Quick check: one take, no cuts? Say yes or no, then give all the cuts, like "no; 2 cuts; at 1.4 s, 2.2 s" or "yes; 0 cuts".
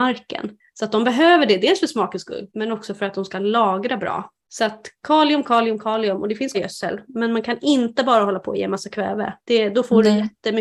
no; 3 cuts; at 2.5 s, 6.5 s, 9.4 s